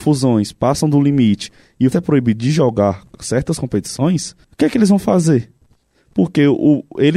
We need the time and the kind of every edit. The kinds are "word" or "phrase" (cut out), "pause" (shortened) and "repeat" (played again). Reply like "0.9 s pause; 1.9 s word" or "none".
1.9 s word; 4.4 s pause